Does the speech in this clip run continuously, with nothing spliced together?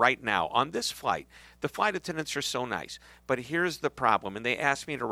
yes; 0 cuts

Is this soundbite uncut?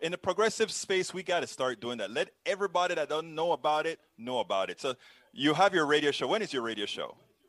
yes; 0 cuts

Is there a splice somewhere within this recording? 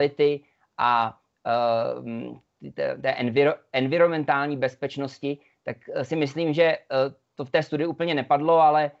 no; 0 cuts

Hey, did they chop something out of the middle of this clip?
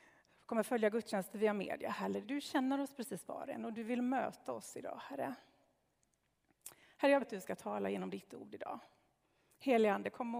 yes; 2 cuts; at 2.2 s, 7.2 s

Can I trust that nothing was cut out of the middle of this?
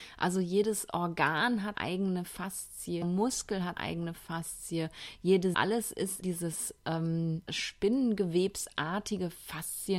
no; 6 cuts; at 1.7 s, 3.0 s, 3.8 s, 5.5 s, 6.2 s, 7.5 s

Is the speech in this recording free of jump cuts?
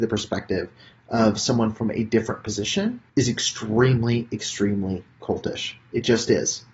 no; 1 cut; at 3.1 s

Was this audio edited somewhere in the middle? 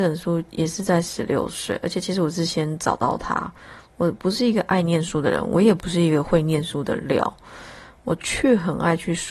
yes; 1 cut; at 3.9 s

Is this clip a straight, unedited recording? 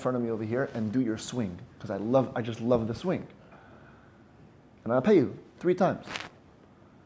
no; 1 cut; at 1.7 s

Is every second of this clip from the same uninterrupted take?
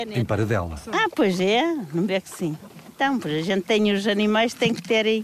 yes; 0 cuts

